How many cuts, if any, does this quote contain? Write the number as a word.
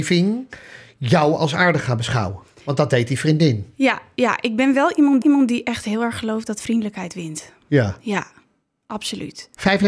one